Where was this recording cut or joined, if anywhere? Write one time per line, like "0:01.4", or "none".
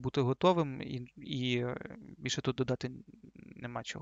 none